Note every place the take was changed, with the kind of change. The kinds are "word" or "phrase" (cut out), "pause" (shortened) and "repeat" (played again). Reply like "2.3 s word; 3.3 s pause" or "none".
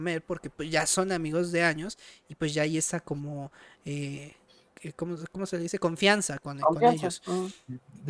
none